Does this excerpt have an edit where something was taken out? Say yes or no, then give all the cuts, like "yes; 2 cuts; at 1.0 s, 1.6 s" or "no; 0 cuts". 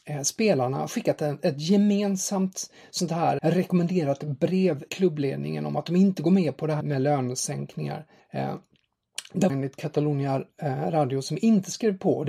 yes; 5 cuts; at 3.4 s, 4.9 s, 6.8 s, 8.2 s, 9.5 s